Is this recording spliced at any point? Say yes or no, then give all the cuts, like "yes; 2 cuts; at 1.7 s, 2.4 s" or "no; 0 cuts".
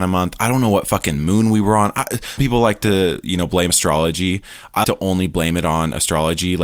yes; 3 cuts; at 2.4 s, 3.7 s, 4.8 s